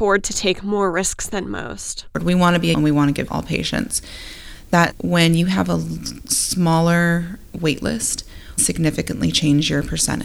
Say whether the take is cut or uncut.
cut